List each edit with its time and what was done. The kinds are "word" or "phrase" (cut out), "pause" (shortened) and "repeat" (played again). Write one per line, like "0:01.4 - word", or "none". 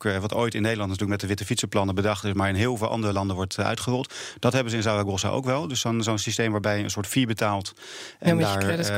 none